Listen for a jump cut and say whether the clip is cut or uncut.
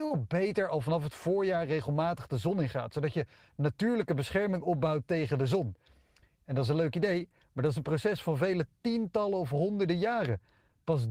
uncut